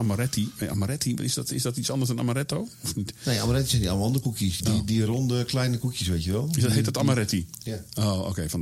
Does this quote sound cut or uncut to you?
cut